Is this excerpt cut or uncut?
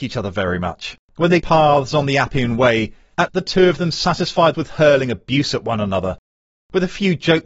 cut